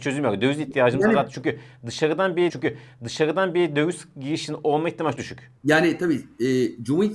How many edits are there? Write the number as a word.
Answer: three